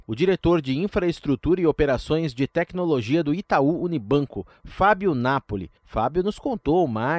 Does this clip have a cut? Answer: yes; 1 cut; at 5.8 s

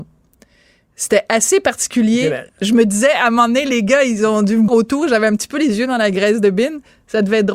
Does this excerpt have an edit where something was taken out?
yes; 2 cuts; at 2.5 s, 4.7 s

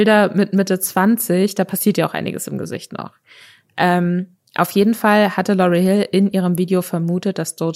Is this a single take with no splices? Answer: yes; 0 cuts

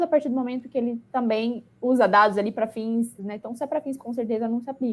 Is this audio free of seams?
no; 3 cuts; at 1.1 s, 3.2 s, 4.0 s

